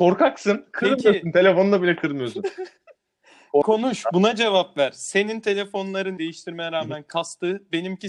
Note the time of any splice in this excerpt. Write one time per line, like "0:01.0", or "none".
0:03.6
0:06.2